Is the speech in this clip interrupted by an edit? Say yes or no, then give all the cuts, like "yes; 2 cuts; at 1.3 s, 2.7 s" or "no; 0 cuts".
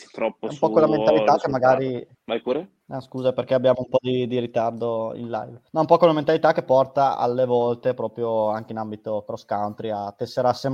yes; 3 cuts; at 2.2 s, 2.8 s, 5.7 s